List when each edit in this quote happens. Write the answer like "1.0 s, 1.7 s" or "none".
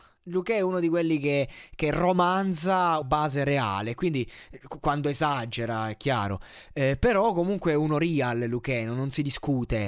3.0 s

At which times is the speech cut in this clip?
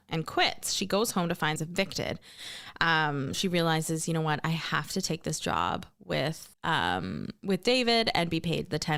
1.6 s, 3.3 s, 6.5 s

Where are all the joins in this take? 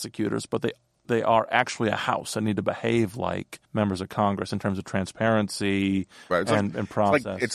3.6 s

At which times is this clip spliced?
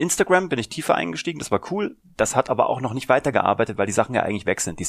none

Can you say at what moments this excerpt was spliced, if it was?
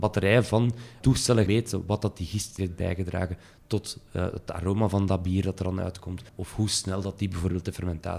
1.0 s, 1.5 s, 2.6 s, 6.3 s

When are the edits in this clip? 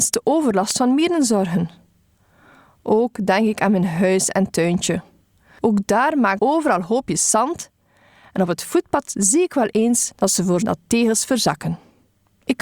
6.4 s, 10.1 s, 10.6 s

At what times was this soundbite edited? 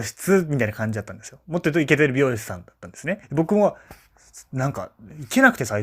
3.2 s

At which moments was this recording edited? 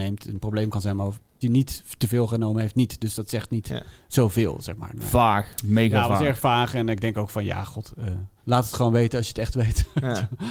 1.4 s, 8.4 s

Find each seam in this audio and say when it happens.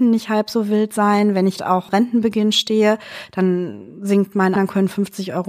1.6 s, 1.9 s, 4.6 s

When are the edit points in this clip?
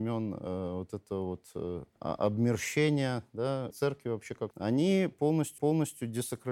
2.0 s, 3.7 s, 4.5 s, 5.6 s

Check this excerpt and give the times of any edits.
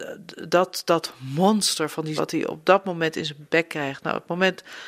2.2 s

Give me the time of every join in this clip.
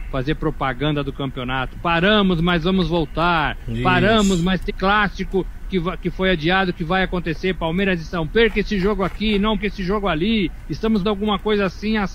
4.7 s, 8.3 s, 9.6 s, 11.0 s

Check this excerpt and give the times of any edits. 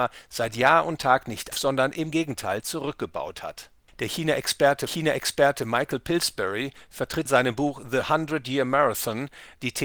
1.5 s, 4.9 s, 7.3 s

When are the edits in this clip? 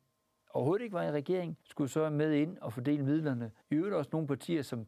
1.6 s, 3.6 s

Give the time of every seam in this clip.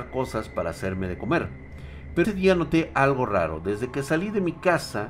2.2 s

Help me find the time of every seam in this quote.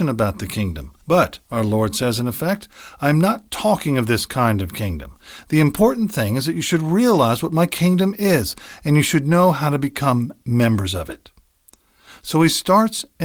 1.0 s

